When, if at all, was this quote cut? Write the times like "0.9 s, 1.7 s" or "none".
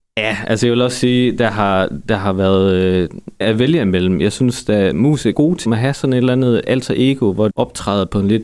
3.4 s, 5.3 s, 5.7 s, 7.5 s